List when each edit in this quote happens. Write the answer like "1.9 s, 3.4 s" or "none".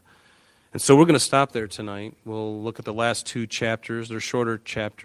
none